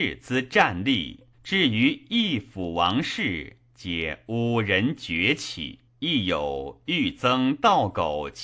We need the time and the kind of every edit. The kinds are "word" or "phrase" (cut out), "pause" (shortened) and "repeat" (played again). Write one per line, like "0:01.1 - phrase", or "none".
0:01.3 - pause
0:05.9 - pause